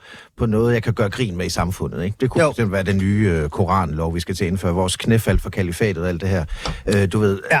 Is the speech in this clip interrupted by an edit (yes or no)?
no